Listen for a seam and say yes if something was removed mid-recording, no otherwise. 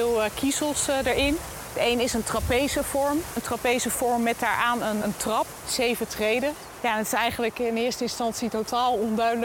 yes